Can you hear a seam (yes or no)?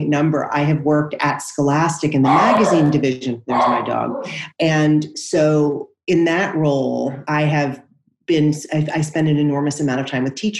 no